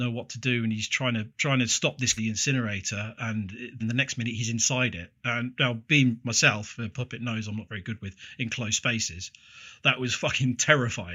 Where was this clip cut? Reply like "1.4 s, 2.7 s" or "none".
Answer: 2.2 s, 3.8 s